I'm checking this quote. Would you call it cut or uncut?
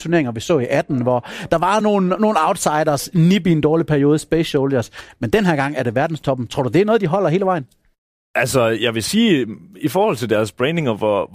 uncut